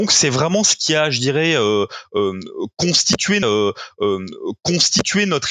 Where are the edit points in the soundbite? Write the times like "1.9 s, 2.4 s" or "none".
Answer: 3.4 s